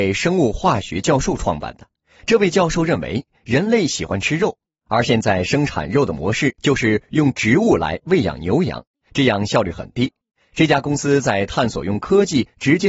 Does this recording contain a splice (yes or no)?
no